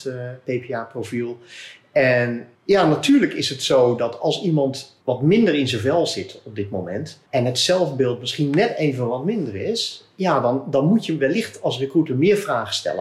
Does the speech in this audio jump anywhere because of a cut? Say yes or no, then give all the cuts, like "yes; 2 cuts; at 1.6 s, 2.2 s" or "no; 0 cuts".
yes; 3 cuts; at 2.5 s, 5.0 s, 7.3 s